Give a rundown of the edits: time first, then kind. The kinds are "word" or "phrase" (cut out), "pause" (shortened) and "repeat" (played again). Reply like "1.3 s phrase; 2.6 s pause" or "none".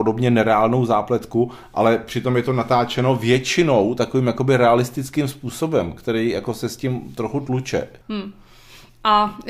8.0 s pause